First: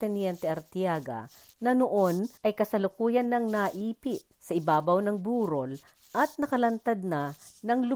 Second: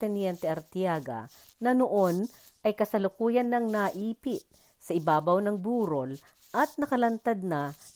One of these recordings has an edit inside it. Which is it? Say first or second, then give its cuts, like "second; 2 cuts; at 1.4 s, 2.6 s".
first; 2 cuts; at 2.4 s, 4.3 s